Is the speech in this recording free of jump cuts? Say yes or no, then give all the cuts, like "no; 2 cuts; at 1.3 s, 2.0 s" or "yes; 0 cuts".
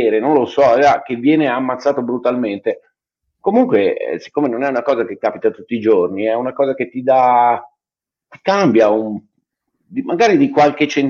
yes; 0 cuts